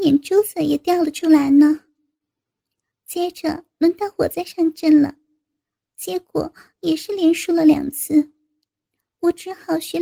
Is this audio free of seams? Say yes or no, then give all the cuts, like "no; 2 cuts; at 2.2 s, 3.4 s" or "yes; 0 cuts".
yes; 0 cuts